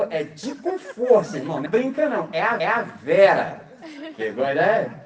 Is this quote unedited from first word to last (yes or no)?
no